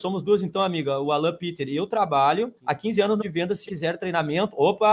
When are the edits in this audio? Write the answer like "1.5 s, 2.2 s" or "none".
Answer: 2.6 s, 3.2 s, 3.7 s